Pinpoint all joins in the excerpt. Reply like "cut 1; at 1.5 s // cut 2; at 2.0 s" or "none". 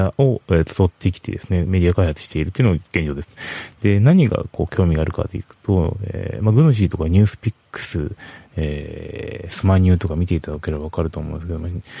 cut 1; at 2.8 s